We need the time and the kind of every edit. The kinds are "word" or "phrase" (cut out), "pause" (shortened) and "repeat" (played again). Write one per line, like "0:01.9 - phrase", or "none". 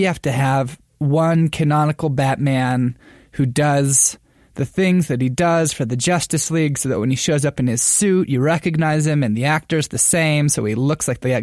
none